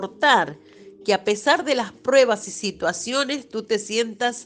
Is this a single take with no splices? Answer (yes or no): yes